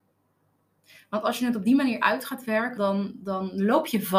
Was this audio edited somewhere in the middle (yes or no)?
yes